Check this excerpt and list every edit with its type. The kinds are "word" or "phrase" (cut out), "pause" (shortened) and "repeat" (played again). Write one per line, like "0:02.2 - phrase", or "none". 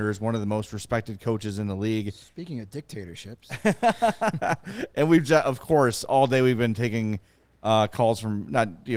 none